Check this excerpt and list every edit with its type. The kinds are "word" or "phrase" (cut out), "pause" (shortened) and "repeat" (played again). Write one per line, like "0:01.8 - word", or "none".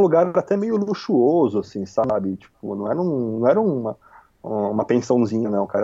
none